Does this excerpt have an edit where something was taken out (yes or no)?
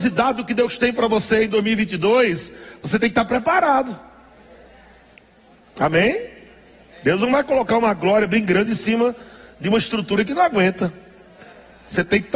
no